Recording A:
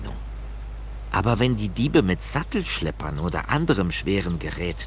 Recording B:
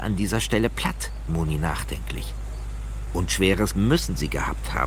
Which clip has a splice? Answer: B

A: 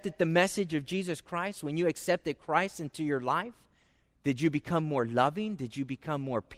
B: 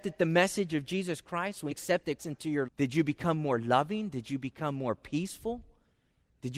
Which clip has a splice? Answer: B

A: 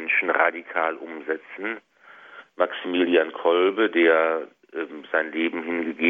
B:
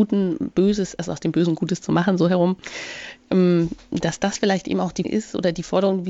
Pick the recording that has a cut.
B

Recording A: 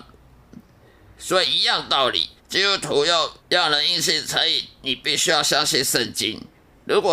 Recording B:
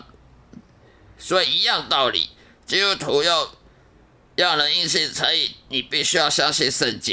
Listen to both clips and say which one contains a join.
A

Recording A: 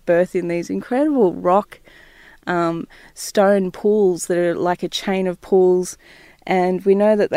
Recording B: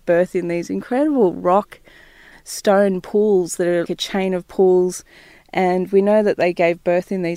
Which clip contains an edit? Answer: B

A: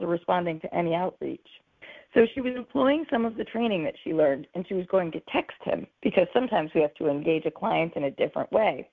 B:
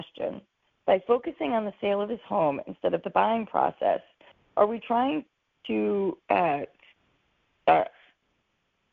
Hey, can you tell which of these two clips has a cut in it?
A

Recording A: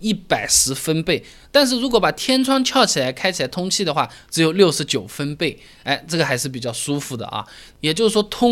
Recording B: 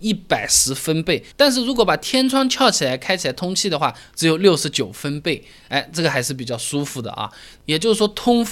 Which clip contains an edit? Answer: B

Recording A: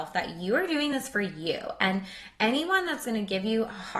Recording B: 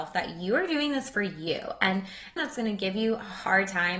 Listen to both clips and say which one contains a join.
B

